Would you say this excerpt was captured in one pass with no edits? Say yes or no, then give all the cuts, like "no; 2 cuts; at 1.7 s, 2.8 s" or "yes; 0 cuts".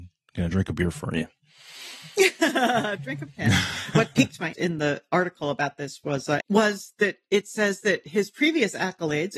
no; 3 cuts; at 3.3 s, 4.5 s, 6.4 s